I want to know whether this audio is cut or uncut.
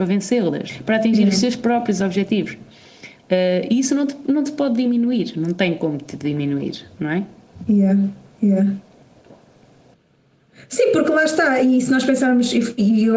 uncut